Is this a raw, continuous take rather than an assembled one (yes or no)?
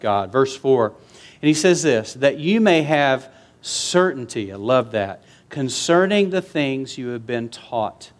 yes